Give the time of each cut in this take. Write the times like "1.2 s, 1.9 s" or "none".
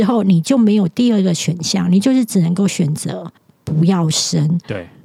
3.4 s